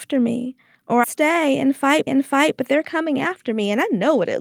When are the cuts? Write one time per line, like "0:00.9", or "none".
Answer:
0:01.0
0:02.1